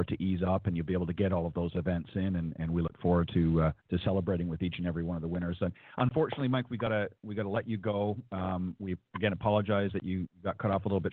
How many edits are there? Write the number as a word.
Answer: one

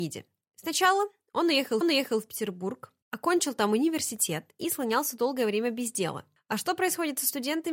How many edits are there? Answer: two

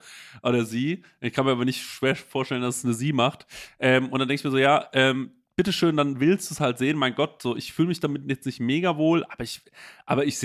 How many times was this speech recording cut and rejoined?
zero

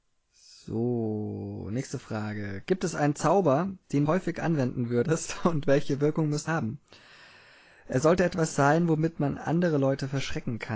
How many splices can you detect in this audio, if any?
two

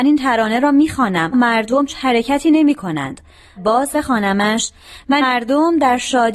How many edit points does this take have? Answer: five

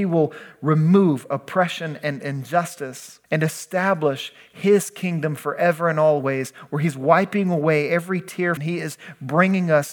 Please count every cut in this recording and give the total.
two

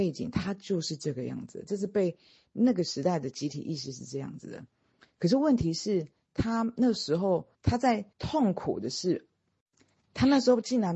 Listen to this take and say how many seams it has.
two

